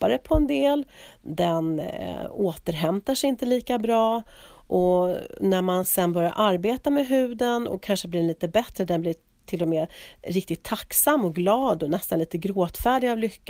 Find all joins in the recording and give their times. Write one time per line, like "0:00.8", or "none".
none